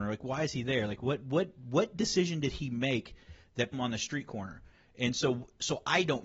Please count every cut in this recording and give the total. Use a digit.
1